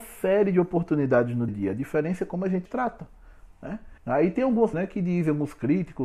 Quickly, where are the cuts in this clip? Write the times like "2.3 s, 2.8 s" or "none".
1.5 s, 2.7 s, 4.0 s, 4.7 s

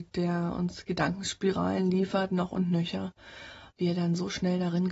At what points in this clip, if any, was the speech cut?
3.8 s

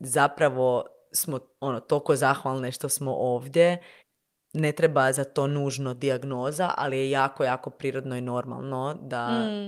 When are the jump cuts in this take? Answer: 1.6 s, 4.0 s

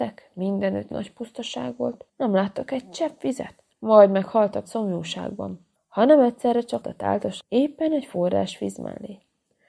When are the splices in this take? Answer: 0.9 s, 2.1 s, 3.7 s, 4.6 s, 5.8 s, 6.8 s, 7.4 s

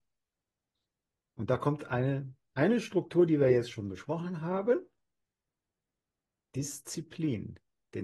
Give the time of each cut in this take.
none

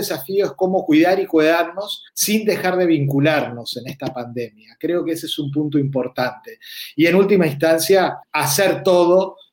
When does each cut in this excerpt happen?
2.1 s, 8.2 s

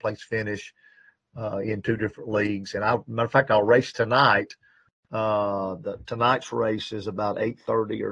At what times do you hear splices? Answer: none

